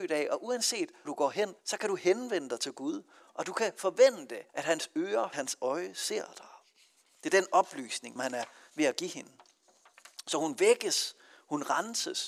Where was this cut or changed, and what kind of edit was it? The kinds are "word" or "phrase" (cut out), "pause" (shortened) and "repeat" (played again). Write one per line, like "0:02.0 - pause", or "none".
0:01.0 - word
0:01.6 - pause
0:04.5 - pause
0:05.3 - phrase
0:08.2 - word